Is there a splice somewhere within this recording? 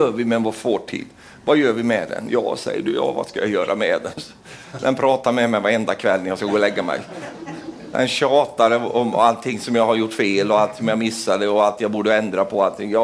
no; 0 cuts

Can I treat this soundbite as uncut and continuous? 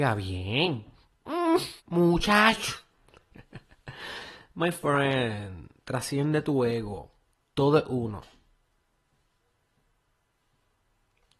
no; 2 cuts; at 1.8 s, 7.3 s

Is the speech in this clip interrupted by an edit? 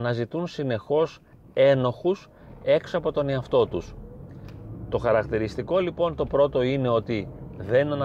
no; 0 cuts

